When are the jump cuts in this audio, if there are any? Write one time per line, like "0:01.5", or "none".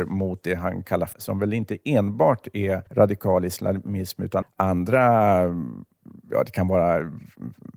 0:01.1
0:02.9
0:04.4